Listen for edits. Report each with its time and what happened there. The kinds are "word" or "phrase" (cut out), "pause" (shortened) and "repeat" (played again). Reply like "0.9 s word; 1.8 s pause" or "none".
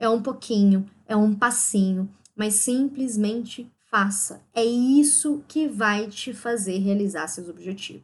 3.8 s pause